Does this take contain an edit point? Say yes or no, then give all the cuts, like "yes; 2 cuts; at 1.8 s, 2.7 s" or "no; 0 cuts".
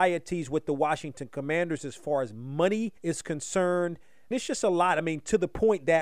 yes; 2 cuts; at 3.0 s, 4.3 s